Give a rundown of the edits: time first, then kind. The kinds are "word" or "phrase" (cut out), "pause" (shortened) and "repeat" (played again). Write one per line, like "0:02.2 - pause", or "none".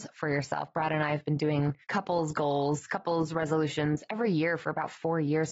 0:01.8 - pause